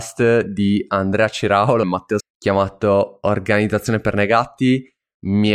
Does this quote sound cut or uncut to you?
cut